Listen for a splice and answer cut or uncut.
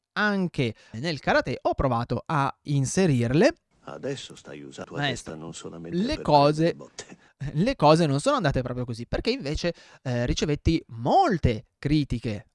cut